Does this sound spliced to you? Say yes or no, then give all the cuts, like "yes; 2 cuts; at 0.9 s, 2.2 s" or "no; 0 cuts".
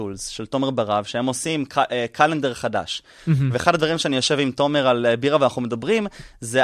no; 0 cuts